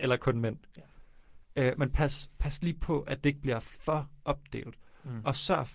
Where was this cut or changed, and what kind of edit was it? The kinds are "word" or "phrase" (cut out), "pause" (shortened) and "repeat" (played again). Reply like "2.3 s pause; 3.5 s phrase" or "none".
none